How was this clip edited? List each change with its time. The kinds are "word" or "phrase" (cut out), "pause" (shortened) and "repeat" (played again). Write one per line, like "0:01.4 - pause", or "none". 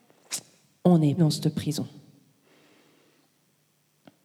0:01.2 - word